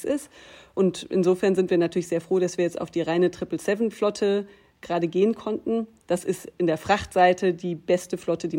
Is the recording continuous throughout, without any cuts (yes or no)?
yes